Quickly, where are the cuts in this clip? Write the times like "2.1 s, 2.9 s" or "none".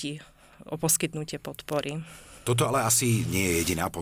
none